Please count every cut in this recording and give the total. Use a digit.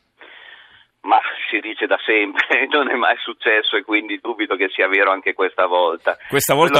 0